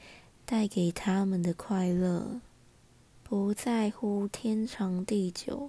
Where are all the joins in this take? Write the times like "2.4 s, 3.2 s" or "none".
2.8 s